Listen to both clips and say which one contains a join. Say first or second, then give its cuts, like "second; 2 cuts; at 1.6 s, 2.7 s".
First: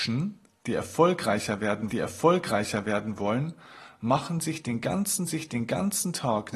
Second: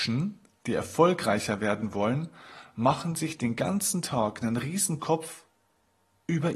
first; 2 cuts; at 1.9 s, 5.3 s